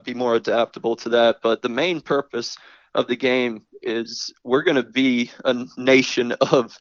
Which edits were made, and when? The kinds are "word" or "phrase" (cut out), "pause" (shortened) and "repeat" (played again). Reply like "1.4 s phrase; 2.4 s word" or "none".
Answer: none